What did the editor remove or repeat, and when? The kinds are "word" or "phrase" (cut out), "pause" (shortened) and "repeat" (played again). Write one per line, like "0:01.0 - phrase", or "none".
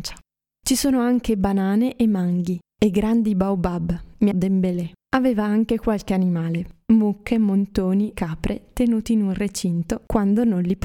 0:04.3 - phrase
0:05.0 - pause
0:08.1 - word